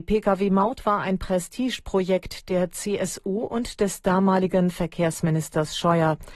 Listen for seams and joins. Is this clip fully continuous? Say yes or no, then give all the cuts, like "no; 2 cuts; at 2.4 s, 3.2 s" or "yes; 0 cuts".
yes; 0 cuts